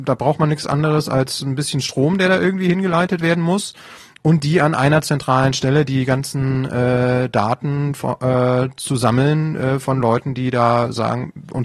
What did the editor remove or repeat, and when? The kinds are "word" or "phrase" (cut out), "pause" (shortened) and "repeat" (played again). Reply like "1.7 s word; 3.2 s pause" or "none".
none